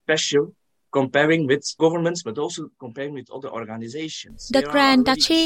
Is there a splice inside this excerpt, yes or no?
yes